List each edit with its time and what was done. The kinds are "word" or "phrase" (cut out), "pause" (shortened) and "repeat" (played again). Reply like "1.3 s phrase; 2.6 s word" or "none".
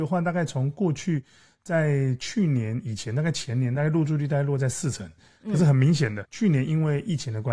6.2 s word